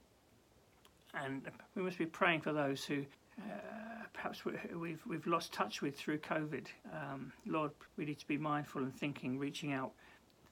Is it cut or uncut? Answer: cut